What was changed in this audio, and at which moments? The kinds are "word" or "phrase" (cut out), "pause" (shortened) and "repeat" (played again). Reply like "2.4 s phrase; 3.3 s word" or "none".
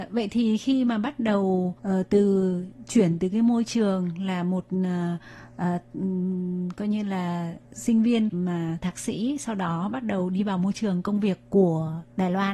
1.8 s pause